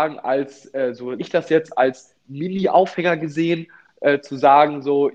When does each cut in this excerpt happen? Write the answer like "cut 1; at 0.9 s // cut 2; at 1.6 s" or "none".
cut 1; at 1.2 s